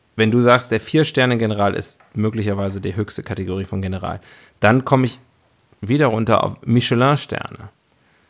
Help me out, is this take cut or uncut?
uncut